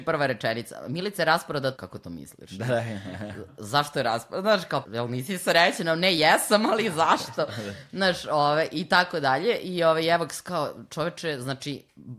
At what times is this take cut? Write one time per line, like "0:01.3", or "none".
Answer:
0:01.8
0:04.8